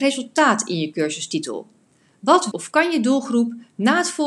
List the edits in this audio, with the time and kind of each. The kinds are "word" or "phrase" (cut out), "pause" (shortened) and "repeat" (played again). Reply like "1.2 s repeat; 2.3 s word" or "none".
2.5 s word